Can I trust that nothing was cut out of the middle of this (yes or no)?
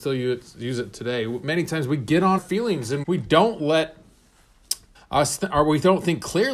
no